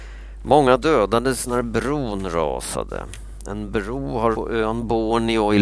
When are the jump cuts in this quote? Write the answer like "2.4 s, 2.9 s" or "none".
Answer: 4.3 s